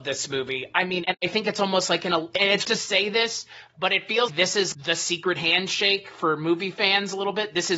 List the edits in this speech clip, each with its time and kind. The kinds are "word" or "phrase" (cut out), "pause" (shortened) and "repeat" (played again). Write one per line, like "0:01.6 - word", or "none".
0:02.6 - word
0:04.3 - word
0:04.7 - word